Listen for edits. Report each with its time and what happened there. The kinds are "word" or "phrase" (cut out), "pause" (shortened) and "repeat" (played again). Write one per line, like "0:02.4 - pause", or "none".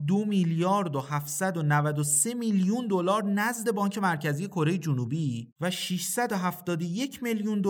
none

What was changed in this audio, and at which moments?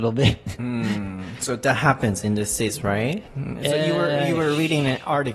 0:03.3 - pause

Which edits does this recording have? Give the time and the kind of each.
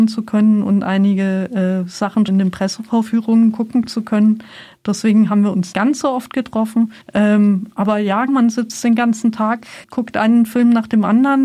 0:02.3 - word
0:05.7 - word
0:07.0 - pause
0:08.3 - word
0:09.8 - word

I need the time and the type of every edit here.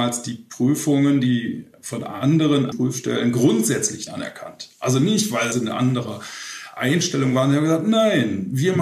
0:02.7 - word
0:04.1 - word
0:05.5 - phrase

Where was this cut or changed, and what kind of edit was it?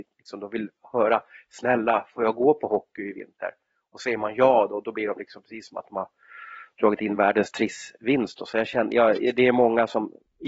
none

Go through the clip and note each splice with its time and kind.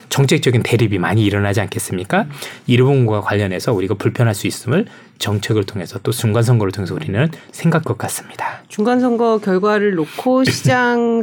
0:07.8 - phrase

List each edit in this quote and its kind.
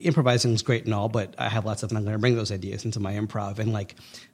0:01.9 - word

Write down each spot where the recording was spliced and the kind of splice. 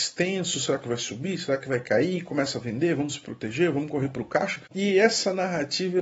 none

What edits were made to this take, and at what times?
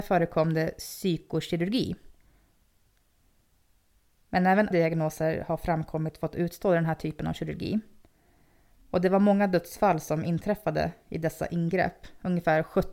0:04.7 - word

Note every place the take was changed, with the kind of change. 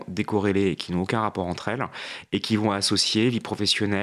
none

